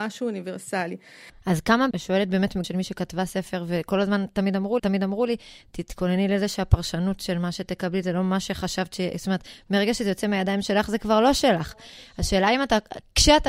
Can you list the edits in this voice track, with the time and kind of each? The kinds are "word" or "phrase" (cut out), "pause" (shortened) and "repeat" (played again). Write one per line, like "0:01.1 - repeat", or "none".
0:01.9 - phrase
0:02.6 - phrase
0:04.8 - repeat